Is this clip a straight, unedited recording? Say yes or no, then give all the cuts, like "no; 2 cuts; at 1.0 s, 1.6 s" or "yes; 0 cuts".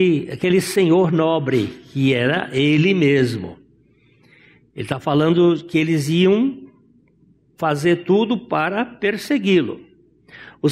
yes; 0 cuts